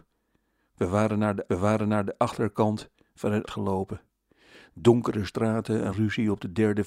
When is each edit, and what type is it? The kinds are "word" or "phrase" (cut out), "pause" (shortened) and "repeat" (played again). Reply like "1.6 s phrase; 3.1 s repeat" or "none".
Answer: 1.5 s repeat; 3.5 s word; 5.9 s word